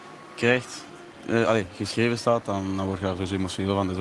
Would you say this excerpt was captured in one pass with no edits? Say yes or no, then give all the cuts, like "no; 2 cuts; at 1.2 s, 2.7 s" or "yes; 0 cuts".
yes; 0 cuts